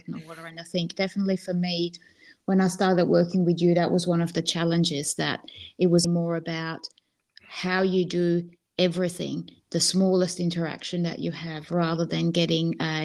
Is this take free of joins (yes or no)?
no